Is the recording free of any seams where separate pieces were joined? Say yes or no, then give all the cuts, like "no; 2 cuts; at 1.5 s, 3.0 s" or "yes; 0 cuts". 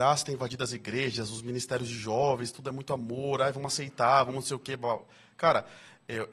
yes; 0 cuts